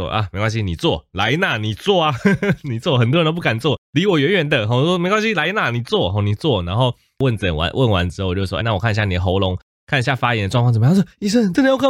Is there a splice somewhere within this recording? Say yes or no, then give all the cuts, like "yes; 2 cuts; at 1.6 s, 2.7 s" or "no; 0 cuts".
yes; 1 cut; at 8.6 s